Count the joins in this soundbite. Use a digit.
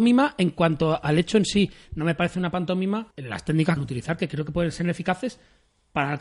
2